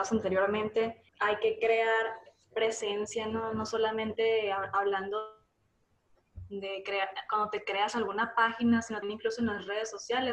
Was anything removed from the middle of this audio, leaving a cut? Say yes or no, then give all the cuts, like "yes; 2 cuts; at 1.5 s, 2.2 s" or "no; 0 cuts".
yes; 2 cuts; at 1.1 s, 9.0 s